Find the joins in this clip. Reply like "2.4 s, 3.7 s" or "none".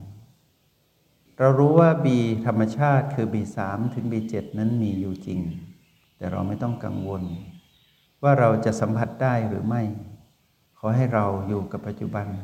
none